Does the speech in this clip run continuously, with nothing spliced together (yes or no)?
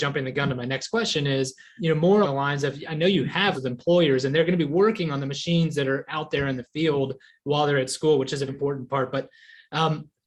no